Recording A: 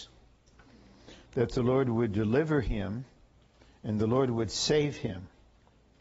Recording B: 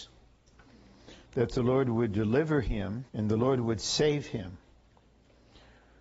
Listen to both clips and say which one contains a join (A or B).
B